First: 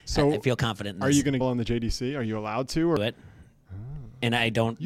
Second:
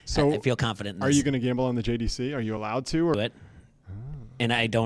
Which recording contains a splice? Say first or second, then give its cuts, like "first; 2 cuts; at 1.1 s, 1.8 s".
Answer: first; 1 cut; at 1.4 s